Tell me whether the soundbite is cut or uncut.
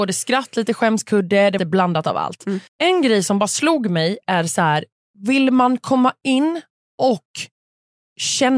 cut